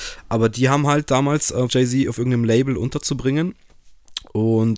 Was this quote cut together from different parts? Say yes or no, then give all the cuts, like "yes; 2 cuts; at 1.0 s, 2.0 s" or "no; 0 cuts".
yes; 1 cut; at 1.7 s